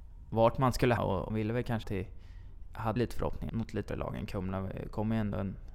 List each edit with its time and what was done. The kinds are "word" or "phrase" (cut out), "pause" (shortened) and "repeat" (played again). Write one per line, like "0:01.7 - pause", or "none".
0:01.0 - word
0:01.3 - word
0:01.8 - word
0:03.0 - word
0:03.5 - word
0:03.9 - word